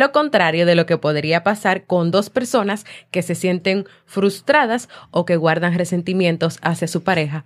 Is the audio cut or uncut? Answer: uncut